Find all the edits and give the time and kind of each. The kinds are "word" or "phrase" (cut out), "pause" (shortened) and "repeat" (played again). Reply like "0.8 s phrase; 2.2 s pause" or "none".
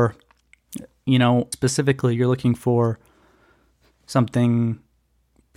1.5 s phrase